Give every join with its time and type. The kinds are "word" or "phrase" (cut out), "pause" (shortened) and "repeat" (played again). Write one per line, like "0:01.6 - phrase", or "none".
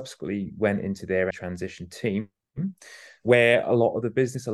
0:01.3 - word